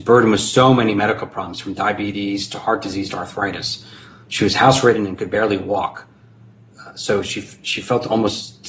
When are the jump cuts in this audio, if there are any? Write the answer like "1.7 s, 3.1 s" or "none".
none